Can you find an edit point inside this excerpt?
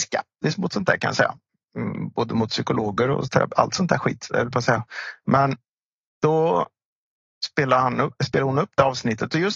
no; 0 cuts

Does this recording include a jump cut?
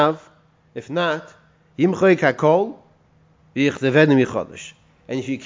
no; 0 cuts

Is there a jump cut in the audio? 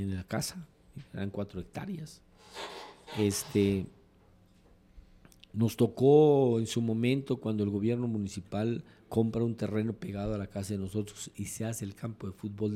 no; 0 cuts

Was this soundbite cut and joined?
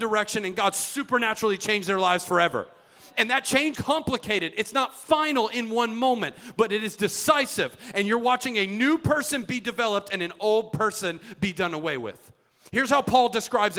yes; 1 cut; at 3.7 s

